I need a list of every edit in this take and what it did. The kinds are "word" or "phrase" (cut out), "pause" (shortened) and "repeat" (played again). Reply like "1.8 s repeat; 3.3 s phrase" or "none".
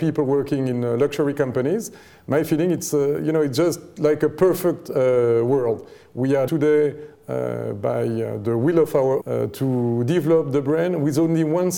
6.5 s word; 9.2 s word